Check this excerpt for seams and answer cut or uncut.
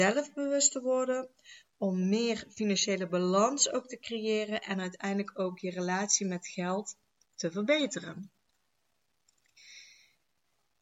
uncut